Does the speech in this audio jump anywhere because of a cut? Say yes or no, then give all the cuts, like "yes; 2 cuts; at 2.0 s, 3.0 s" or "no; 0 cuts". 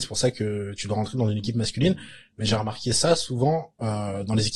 no; 0 cuts